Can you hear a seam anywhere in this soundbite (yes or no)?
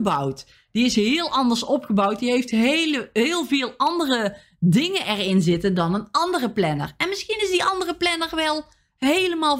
no